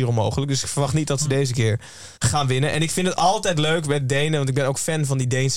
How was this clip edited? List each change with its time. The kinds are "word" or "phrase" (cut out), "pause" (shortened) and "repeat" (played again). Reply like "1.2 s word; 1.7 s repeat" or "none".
2.2 s pause